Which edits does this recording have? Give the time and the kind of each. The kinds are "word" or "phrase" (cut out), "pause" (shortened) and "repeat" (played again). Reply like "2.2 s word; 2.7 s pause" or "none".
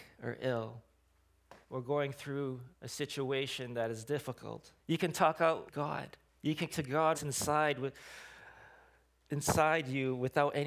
1.6 s pause; 2.7 s pause; 4.8 s pause; 5.7 s phrase; 6.3 s pause; 6.7 s word; 7.1 s word